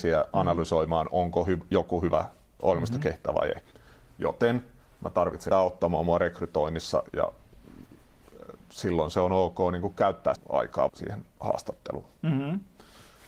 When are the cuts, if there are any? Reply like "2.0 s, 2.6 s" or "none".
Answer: 5.5 s, 7.1 s, 10.4 s, 10.9 s